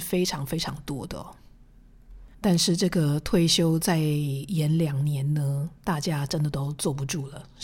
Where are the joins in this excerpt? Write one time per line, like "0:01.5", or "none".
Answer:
0:02.3